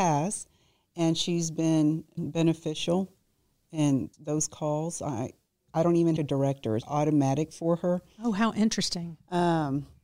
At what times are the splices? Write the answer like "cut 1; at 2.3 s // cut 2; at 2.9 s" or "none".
cut 1; at 2.2 s // cut 2; at 4.1 s // cut 3; at 6.2 s // cut 4; at 6.8 s